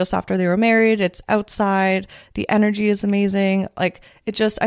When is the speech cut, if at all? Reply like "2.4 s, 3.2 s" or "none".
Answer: none